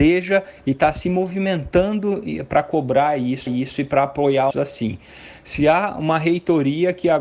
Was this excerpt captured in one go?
no; 2 cuts; at 3.5 s, 4.5 s

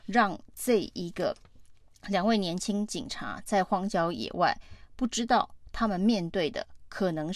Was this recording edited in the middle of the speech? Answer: no; 0 cuts

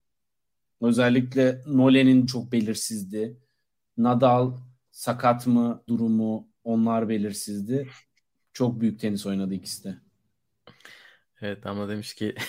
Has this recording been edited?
yes; 2 cuts; at 2.3 s, 5.9 s

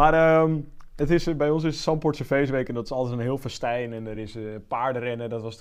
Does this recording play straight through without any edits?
yes; 0 cuts

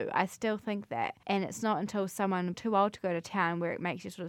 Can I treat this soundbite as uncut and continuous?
no; 2 cuts; at 1.2 s, 2.5 s

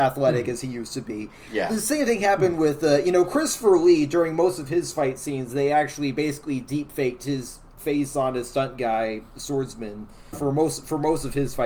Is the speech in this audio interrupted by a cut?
yes; 1 cut; at 10.3 s

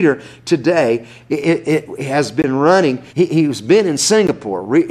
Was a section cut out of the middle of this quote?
yes; 1 cut; at 3.1 s

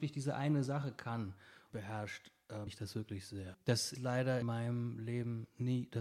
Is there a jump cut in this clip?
yes; 4 cuts; at 1.7 s, 2.7 s, 3.9 s, 4.4 s

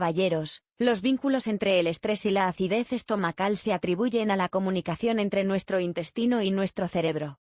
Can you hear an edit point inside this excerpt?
no; 0 cuts

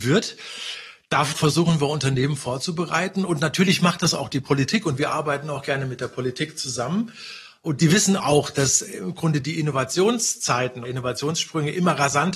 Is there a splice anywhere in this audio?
yes; 2 cuts; at 1.3 s, 10.8 s

